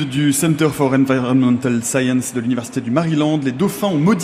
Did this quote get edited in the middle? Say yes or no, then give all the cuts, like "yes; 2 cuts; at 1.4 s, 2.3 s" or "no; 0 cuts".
no; 0 cuts